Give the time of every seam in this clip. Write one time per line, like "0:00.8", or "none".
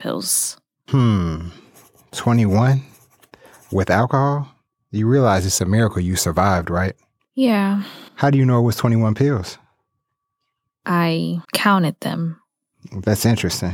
0:08.1
0:11.4